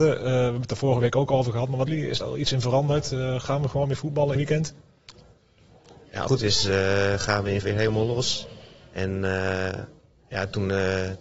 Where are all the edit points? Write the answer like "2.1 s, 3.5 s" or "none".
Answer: 1.9 s, 2.2 s, 4.4 s, 6.3 s, 7.6 s